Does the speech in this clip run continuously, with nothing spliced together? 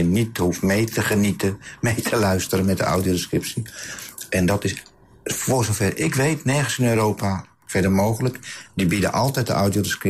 yes; 0 cuts

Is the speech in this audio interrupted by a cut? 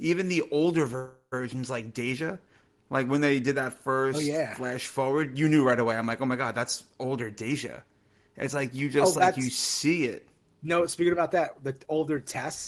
no; 0 cuts

